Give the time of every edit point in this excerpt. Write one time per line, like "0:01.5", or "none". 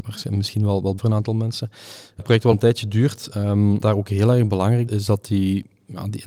0:01.0
0:02.2
0:02.5
0:03.8
0:04.9